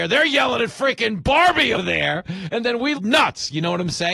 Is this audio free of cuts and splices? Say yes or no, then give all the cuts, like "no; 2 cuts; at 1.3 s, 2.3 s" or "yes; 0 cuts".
no; 2 cuts; at 1.7 s, 3.0 s